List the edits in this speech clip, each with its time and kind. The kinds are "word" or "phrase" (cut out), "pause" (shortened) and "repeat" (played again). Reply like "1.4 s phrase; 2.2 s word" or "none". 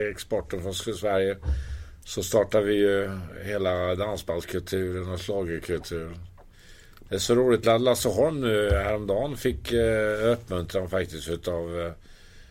none